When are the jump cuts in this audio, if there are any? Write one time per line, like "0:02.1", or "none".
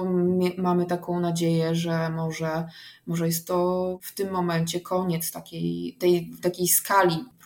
none

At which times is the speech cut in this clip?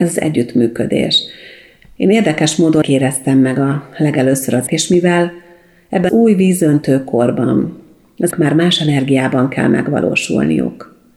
0:02.8
0:04.7
0:06.1
0:08.3

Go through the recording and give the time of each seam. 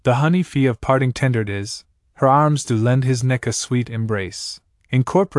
none

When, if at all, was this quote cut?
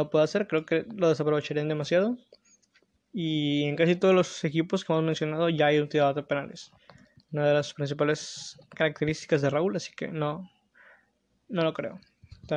none

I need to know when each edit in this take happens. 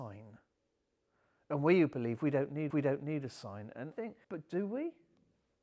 0:02.7
0:03.9
0:04.2

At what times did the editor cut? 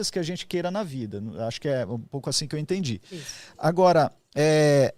none

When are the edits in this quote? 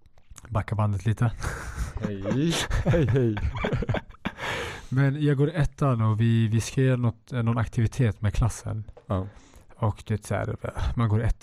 none

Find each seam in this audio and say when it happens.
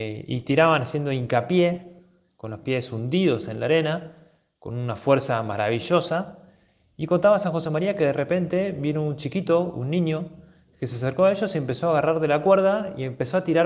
none

